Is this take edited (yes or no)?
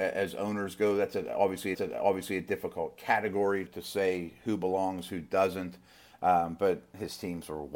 yes